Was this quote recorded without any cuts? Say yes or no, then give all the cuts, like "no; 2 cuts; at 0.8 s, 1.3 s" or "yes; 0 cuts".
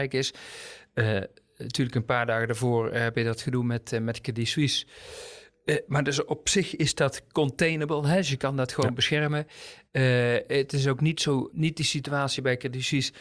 no; 1 cut; at 11.5 s